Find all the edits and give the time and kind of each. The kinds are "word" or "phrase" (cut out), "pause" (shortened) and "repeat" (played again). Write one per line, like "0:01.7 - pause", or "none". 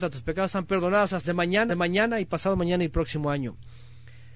0:01.2 - word
0:01.7 - repeat